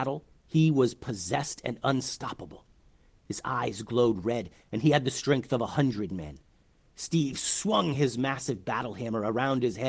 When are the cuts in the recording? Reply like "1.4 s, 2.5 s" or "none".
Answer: none